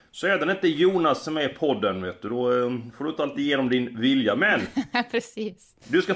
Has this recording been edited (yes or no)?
no